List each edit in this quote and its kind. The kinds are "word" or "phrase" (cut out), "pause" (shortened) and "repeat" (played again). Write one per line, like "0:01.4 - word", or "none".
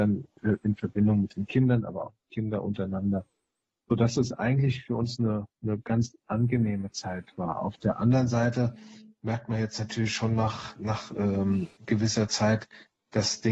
0:05.5 - pause
0:11.8 - word